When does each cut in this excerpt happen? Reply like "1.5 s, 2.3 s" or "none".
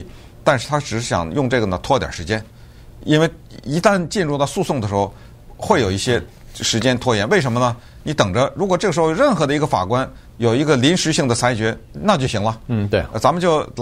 10.3 s